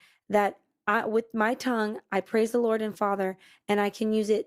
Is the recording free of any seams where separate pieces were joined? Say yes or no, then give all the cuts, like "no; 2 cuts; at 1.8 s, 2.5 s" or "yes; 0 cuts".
yes; 0 cuts